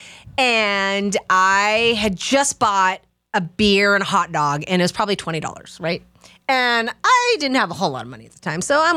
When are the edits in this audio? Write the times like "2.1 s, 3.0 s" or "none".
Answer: none